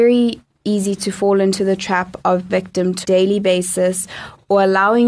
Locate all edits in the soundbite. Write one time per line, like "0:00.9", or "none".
0:02.5
0:03.0